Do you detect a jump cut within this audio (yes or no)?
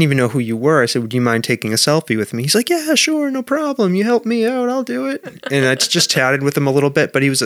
no